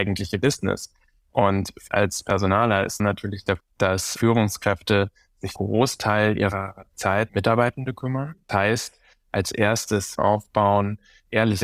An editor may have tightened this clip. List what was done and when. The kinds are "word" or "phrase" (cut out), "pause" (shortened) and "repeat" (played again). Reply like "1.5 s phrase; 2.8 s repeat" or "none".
1.9 s word; 3.0 s word; 3.6 s word; 5.6 s word; 7.3 s word; 8.5 s word; 10.2 s word